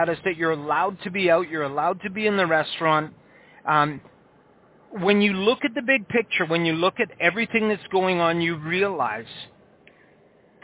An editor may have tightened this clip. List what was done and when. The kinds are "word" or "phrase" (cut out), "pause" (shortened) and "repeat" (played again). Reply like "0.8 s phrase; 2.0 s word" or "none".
none